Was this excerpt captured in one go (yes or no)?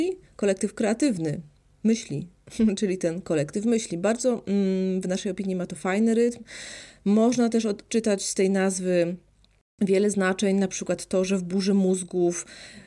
yes